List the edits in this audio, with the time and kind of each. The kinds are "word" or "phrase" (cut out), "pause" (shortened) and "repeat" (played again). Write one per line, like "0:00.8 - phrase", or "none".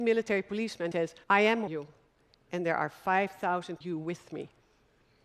0:00.9 - word
0:01.2 - pause
0:01.7 - word
0:03.8 - phrase